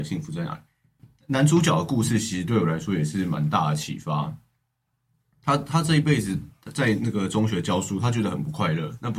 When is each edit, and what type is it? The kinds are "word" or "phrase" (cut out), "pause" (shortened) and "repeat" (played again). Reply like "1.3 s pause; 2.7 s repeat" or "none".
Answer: none